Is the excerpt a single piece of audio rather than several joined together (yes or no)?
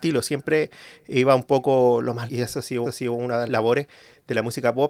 no